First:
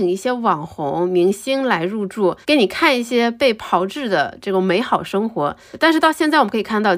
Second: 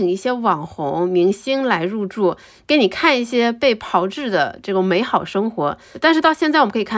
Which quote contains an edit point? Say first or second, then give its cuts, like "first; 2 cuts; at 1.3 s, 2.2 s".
first; 1 cut; at 2.4 s